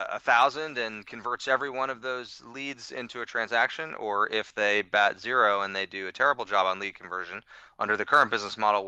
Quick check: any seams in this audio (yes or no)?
no